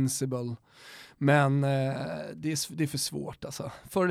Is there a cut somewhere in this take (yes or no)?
no